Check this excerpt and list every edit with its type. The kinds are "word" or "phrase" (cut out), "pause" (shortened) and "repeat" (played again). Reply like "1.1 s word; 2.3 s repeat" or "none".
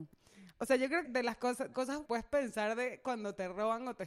1.0 s word; 1.7 s phrase; 2.0 s phrase